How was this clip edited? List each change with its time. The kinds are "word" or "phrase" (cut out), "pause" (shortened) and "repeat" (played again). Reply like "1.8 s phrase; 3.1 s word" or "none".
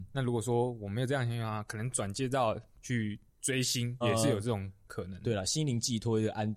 4.0 s word